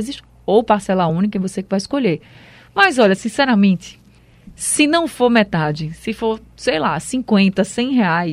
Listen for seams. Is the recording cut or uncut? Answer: uncut